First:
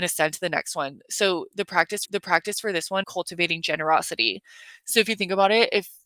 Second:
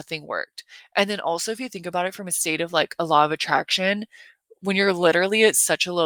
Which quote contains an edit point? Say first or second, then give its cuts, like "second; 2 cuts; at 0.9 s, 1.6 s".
first; 2 cuts; at 2.0 s, 3.0 s